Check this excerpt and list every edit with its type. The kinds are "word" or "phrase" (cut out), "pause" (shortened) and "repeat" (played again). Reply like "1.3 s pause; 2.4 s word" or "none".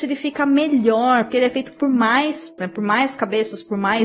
1.3 s word; 2.6 s word

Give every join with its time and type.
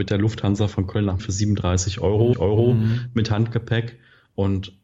1.2 s word; 2.3 s repeat

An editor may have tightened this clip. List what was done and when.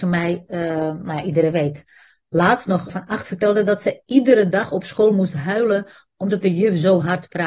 2.9 s word

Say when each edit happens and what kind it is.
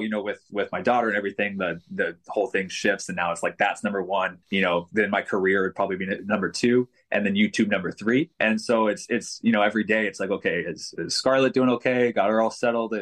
4.4 s pause; 8.3 s pause

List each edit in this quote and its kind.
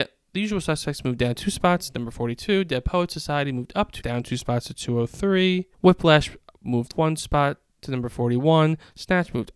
4.0 s word; 5.7 s pause; 6.9 s word

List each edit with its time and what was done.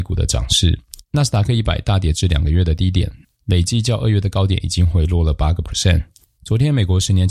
3.2 s pause; 6.2 s pause

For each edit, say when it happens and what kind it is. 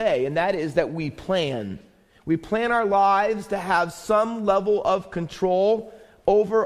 none

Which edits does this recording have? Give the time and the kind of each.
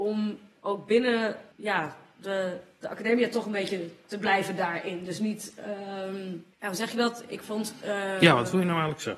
1.5 s pause; 6.5 s pause

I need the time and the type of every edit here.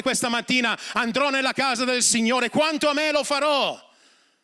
none

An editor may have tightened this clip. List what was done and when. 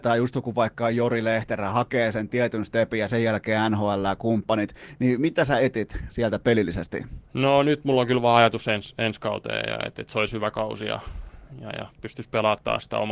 7.3 s pause

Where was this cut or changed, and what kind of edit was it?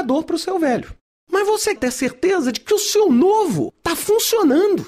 1.8 s word

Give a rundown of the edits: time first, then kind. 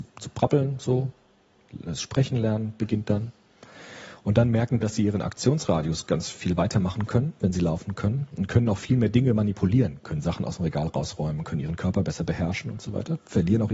4.8 s word

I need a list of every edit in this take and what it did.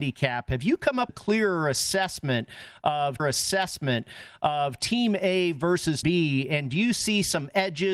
1.1 s word; 3.2 s repeat; 6.0 s word

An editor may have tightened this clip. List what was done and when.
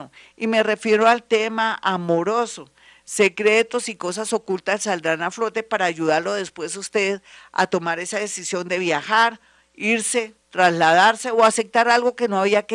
10.4 s pause

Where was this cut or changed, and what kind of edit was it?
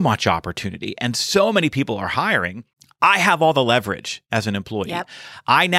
2.7 s pause

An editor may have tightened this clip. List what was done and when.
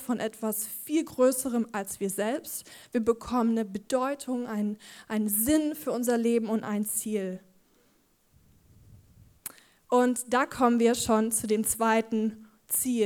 none

